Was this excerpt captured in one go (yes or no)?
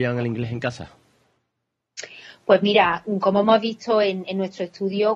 yes